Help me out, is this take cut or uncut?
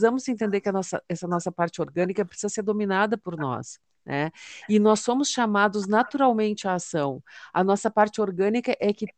uncut